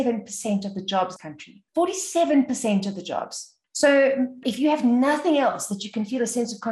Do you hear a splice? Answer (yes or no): yes